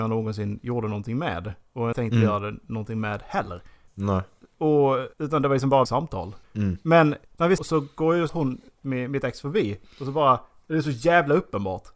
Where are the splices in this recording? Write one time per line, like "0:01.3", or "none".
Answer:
0:01.9
0:03.9
0:05.1
0:05.8
0:06.4
0:07.2
0:07.6
0:08.3
0:08.7